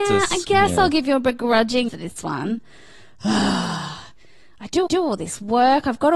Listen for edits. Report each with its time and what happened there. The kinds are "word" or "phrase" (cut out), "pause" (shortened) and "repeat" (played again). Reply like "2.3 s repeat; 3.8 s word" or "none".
1.9 s word; 4.9 s repeat